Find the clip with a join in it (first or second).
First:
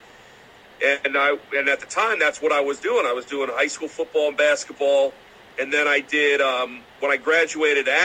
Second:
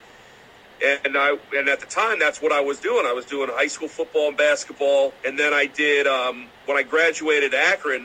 second